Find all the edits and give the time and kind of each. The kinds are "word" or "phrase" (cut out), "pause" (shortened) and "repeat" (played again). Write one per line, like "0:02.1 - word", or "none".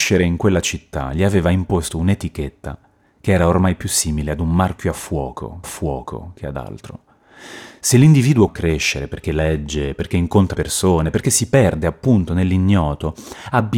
0:05.6 - repeat
0:08.5 - word
0:10.5 - word